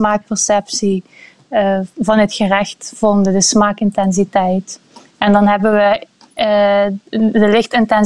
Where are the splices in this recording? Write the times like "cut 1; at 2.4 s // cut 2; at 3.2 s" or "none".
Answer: none